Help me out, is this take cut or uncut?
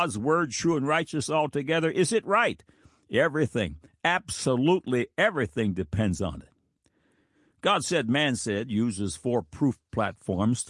uncut